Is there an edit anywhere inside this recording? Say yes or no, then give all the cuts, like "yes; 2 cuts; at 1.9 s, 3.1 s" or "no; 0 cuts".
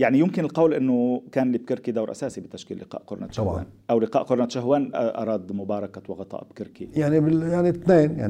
no; 0 cuts